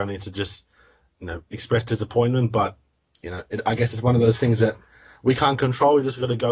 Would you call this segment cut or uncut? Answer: uncut